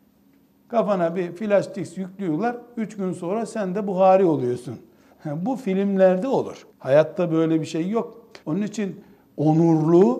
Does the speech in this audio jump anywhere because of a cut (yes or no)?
yes